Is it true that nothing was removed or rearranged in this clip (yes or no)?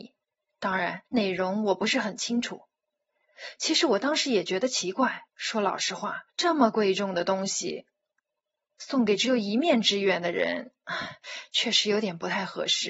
no